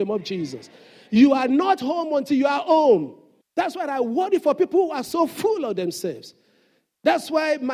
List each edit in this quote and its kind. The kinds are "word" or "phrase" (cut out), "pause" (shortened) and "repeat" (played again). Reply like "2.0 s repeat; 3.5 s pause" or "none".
3.4 s pause

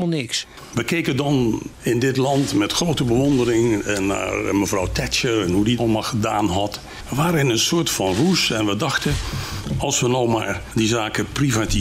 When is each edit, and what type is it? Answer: 5.8 s word

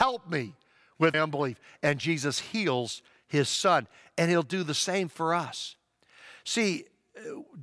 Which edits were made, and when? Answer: 1.1 s word

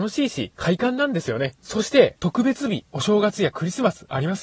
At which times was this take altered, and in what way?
2.1 s phrase

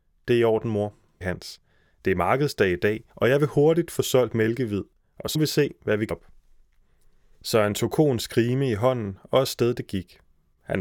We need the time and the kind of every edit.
1.2 s word; 3.1 s pause; 5.3 s word; 6.1 s word

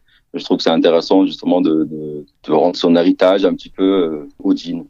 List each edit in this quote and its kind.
none

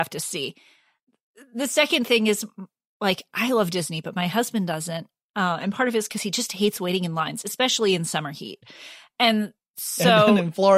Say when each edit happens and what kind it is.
none

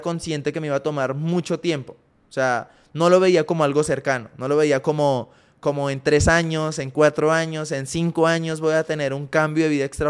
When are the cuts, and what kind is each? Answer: none

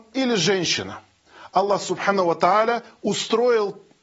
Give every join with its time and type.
none

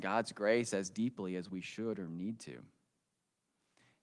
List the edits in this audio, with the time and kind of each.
none

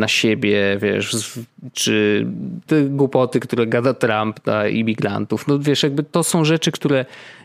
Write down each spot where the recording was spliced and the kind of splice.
2.7 s word

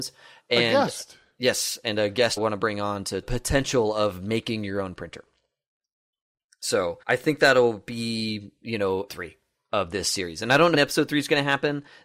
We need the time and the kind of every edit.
2.4 s word; 3.2 s phrase; 7.0 s pause; 9.1 s word; 10.7 s word

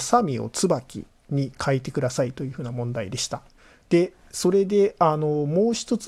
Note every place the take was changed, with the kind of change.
3.6 s pause

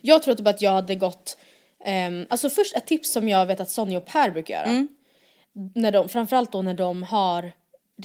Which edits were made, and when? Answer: none

